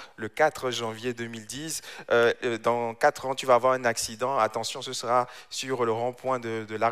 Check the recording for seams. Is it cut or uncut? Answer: uncut